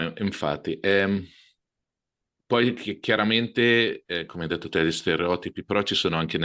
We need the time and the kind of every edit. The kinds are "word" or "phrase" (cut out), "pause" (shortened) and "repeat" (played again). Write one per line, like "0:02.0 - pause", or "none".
none